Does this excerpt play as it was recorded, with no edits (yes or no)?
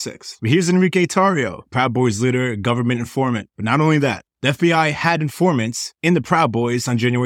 yes